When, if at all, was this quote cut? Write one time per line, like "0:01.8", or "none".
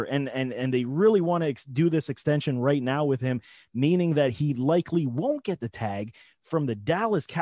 none